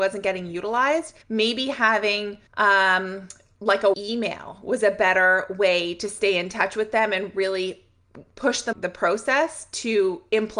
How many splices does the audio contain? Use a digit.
4